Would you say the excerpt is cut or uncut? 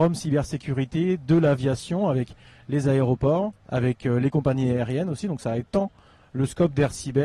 uncut